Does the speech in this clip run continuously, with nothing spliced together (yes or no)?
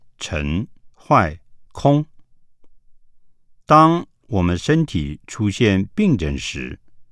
no